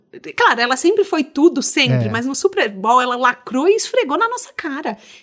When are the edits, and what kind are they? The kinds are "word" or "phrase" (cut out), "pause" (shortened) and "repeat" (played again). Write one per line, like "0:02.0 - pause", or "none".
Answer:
none